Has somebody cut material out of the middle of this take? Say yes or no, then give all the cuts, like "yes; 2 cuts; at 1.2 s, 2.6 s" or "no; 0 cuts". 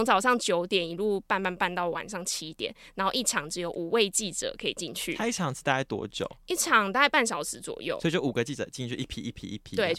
no; 0 cuts